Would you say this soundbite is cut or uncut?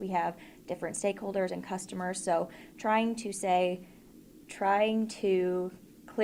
uncut